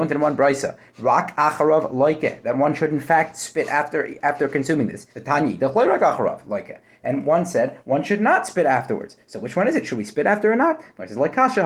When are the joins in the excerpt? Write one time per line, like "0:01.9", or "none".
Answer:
0:05.1